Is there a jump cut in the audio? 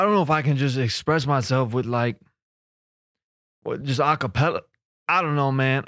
no; 0 cuts

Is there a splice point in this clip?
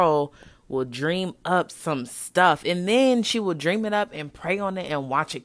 no; 0 cuts

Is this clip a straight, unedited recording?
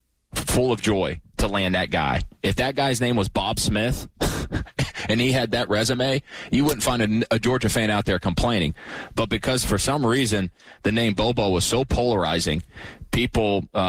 no; 1 cut; at 2.3 s

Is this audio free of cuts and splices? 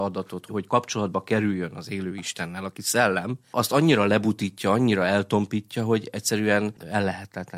yes; 0 cuts

